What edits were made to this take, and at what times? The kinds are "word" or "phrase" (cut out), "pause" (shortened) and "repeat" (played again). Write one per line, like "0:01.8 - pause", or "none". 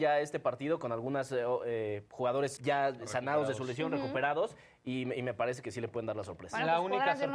0:02.6 - word

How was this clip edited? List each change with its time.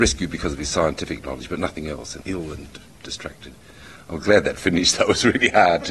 0:02.2 - phrase

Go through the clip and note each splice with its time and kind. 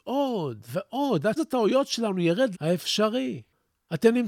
0:01.4 - word
0:02.5 - word

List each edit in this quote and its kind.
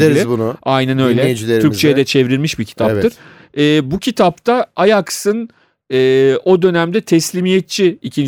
none

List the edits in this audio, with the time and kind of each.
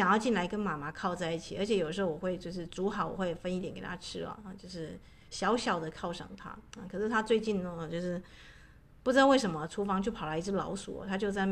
none

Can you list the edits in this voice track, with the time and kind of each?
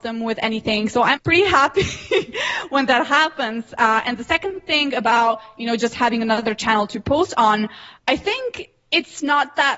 0:01.2 - word

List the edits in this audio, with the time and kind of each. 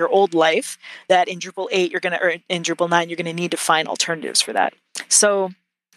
none

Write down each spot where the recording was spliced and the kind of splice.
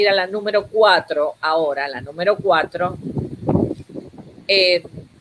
none

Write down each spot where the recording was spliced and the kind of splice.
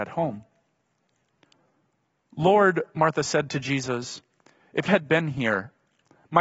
0:02.9 - pause
0:04.9 - word

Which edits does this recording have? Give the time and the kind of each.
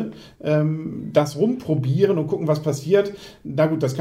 none

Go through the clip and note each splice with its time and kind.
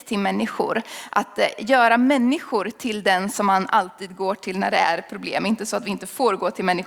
none

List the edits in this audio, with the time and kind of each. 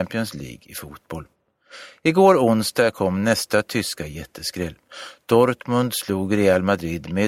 none

